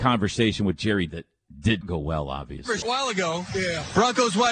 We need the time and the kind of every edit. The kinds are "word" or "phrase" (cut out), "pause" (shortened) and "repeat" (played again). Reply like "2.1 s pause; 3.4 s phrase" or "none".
1.1 s word; 1.8 s word; 2.8 s word